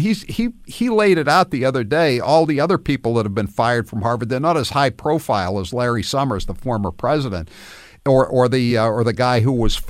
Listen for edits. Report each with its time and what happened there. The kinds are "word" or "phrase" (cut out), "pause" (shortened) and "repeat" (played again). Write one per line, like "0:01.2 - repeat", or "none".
none